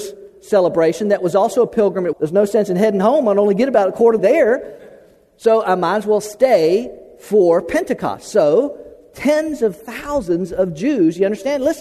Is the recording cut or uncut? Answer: cut